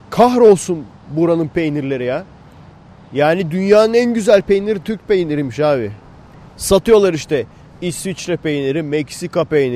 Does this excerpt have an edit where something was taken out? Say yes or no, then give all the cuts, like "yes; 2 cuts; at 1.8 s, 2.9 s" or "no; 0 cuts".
no; 0 cuts